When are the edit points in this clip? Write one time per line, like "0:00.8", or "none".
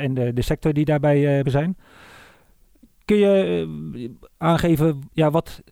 0:01.4